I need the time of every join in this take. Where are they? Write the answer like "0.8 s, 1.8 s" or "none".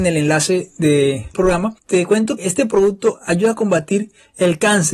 1.3 s, 1.8 s, 2.4 s

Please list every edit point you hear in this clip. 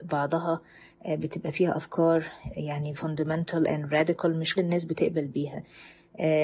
3.0 s, 4.6 s

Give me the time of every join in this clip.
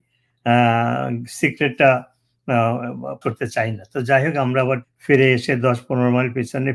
3.2 s, 4.8 s

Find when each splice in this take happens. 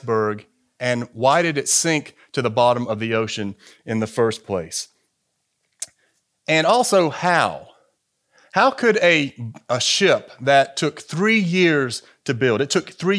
none

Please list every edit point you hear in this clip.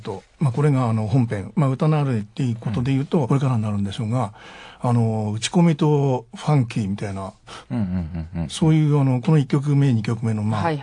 3.3 s

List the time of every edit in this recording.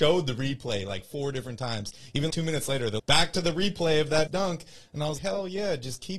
2.3 s, 3.0 s, 4.3 s, 5.2 s

